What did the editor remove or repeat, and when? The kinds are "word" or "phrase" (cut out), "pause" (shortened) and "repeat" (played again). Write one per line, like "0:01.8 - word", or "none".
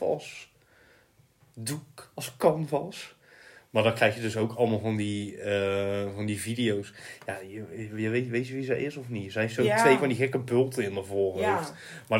none